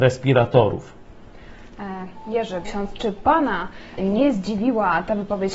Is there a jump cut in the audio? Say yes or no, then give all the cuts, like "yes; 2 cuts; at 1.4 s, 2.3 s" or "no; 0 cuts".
yes; 2 cuts; at 2.7 s, 4.0 s